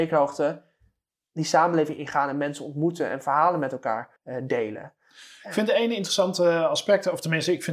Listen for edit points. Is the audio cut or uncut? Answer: cut